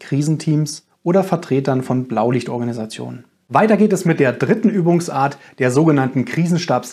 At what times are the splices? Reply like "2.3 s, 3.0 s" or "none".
none